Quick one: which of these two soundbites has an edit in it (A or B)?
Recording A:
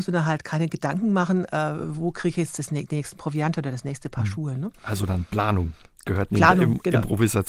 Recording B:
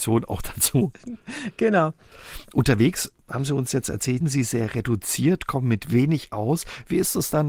B